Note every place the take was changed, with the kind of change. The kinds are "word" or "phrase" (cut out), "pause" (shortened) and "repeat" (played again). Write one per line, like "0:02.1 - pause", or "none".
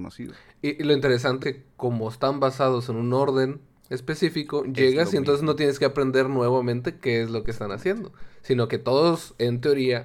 0:01.4 - word